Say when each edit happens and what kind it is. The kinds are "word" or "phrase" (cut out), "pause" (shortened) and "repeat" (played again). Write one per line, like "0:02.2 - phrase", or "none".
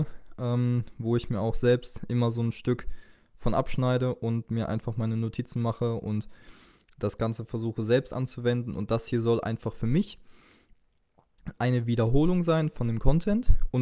0:11.6 - word

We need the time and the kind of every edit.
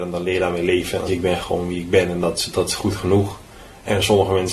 0:01.1 - phrase

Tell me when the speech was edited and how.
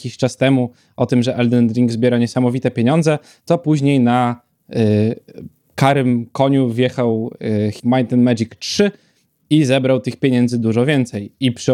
0:07.8 - word

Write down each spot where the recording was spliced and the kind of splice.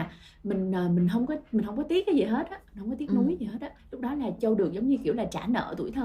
0:03.8 - pause
0:04.4 - word

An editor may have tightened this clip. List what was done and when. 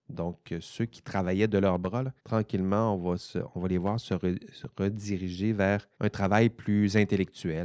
0:02.2 - pause
0:05.9 - pause

